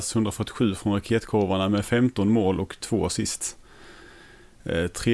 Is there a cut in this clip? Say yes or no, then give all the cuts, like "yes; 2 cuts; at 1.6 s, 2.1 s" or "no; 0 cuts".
no; 0 cuts